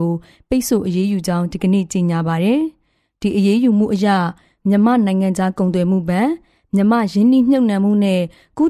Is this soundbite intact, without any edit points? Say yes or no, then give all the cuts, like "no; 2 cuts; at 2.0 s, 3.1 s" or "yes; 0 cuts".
yes; 0 cuts